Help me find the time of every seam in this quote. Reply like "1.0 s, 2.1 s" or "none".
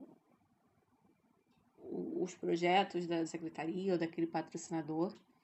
3.3 s